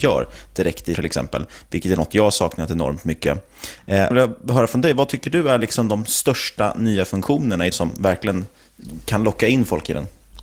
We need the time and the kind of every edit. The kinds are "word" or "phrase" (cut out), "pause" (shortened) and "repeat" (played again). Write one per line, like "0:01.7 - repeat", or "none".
0:00.9 - word
0:04.1 - phrase
0:07.7 - word